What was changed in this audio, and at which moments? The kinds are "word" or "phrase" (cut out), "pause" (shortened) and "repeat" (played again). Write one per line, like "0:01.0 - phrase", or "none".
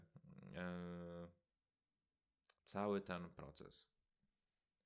0:02.6 - pause